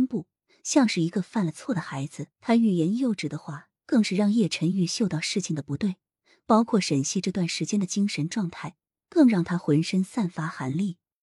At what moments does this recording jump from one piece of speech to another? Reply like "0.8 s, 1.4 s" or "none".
2.3 s